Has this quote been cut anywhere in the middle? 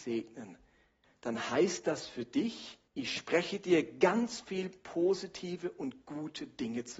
yes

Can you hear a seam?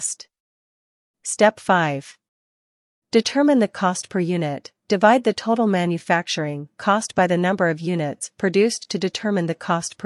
no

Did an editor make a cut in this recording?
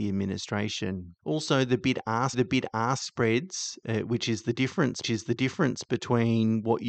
yes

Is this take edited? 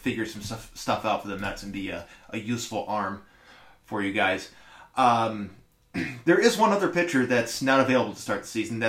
no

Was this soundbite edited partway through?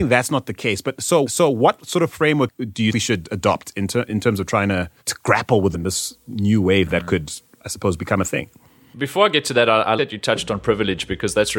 yes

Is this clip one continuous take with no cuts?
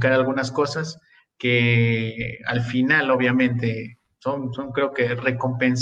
yes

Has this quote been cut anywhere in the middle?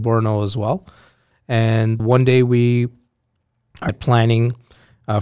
yes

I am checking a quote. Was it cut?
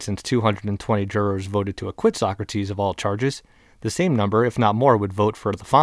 no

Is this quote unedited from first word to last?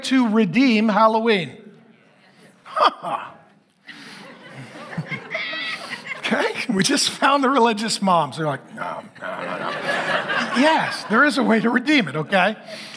yes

